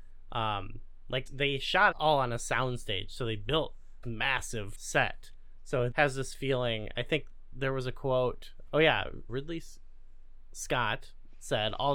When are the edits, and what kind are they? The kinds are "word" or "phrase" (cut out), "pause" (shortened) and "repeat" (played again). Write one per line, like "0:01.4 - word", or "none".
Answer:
0:01.3 - word
0:01.9 - word
0:04.0 - word
0:04.7 - word
0:05.9 - word
0:08.7 - word
0:09.3 - word